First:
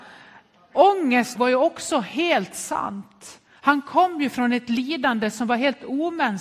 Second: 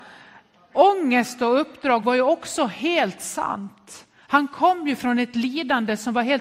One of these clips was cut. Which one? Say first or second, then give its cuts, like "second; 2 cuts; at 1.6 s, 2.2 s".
first; 1 cut; at 1.4 s